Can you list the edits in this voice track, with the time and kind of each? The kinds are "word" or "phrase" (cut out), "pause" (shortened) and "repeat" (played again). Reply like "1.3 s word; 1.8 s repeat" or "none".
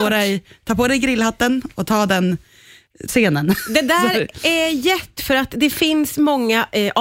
3.1 s word; 5.2 s word